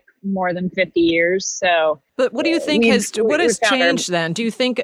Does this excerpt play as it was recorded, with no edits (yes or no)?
no